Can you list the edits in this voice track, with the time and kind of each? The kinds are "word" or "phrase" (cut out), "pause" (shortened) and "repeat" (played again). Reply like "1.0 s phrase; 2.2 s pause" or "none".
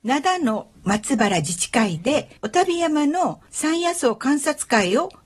2.4 s pause; 3.5 s pause